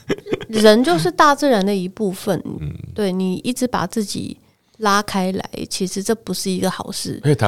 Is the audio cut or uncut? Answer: uncut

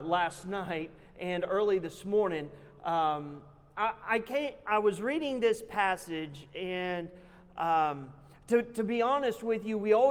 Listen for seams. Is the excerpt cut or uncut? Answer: uncut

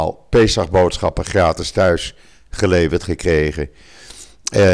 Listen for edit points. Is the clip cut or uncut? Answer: uncut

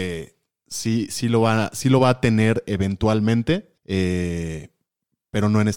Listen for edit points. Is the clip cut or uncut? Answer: cut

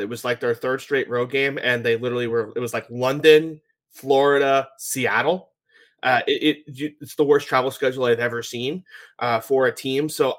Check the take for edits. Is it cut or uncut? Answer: uncut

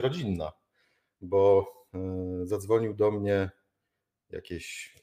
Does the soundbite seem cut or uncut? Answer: uncut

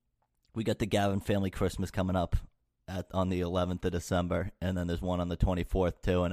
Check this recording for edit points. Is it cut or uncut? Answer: uncut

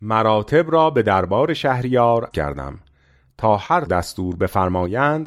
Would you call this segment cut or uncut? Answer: cut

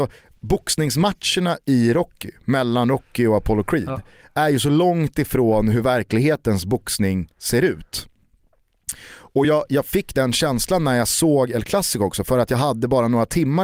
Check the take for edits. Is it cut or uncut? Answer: uncut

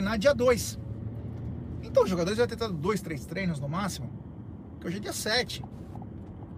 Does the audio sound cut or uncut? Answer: uncut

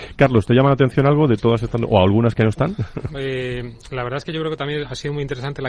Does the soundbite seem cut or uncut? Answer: cut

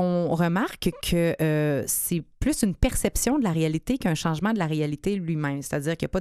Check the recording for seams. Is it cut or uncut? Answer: uncut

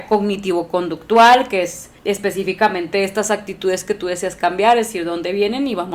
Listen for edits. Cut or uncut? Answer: cut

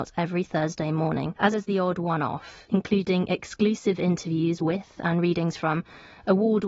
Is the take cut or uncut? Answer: cut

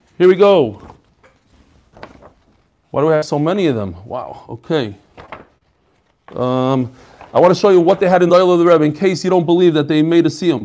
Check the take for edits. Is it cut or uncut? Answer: uncut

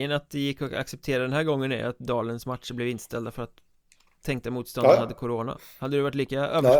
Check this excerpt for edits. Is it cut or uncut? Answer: uncut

